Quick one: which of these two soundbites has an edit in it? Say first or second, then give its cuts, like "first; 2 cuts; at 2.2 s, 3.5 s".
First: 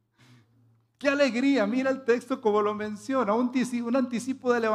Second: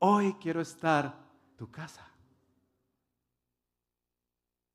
second; 1 cut; at 1.6 s